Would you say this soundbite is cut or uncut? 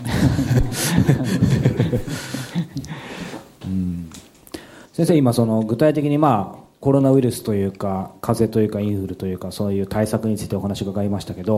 uncut